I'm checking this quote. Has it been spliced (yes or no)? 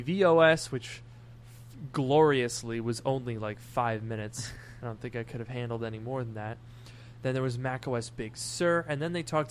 no